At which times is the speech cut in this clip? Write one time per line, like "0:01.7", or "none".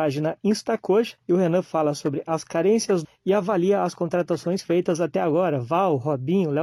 0:01.2
0:03.0